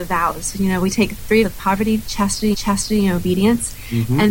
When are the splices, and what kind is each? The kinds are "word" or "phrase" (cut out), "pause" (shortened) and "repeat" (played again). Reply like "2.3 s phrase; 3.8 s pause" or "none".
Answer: 1.4 s word; 2.5 s repeat